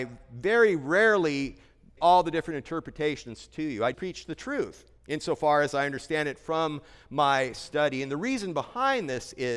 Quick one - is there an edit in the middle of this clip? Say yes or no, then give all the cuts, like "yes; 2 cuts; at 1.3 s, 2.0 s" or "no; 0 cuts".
yes; 3 cuts; at 2.0 s, 3.9 s, 5.0 s